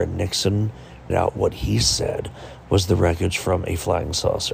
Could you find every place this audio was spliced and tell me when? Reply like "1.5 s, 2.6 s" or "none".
1.1 s

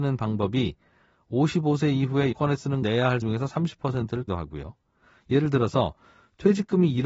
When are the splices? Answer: 2.3 s, 2.8 s, 3.2 s, 4.3 s

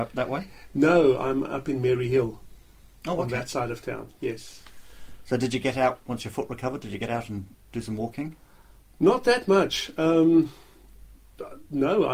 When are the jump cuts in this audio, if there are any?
none

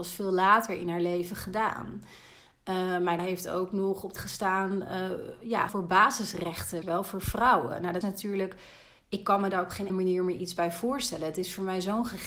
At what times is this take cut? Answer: 3.2 s, 4.2 s, 5.7 s, 6.8 s, 8.0 s, 9.9 s

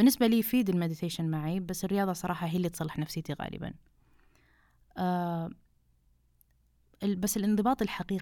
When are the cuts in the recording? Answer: none

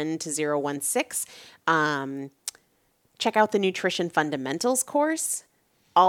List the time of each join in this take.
none

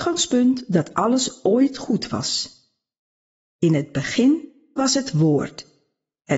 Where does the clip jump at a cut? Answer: none

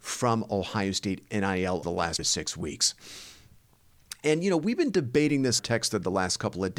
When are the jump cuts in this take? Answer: 1.8 s, 2.2 s, 5.6 s

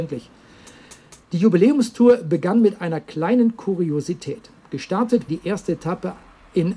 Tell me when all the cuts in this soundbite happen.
1.2 s, 5.3 s

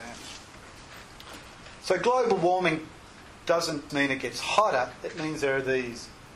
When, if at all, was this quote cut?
3.9 s

